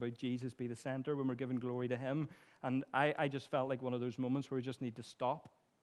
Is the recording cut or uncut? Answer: uncut